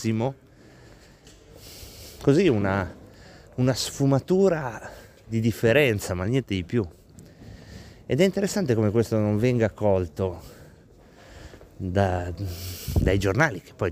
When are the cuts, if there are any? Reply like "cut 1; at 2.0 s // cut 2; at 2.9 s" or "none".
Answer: none